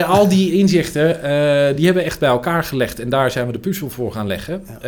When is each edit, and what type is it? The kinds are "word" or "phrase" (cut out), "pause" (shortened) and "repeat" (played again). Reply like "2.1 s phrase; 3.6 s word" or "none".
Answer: none